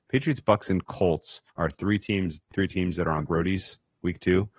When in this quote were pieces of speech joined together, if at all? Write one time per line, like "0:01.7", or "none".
0:01.5
0:02.5
0:03.3